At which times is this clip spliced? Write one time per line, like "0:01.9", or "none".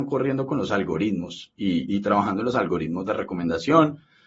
0:01.9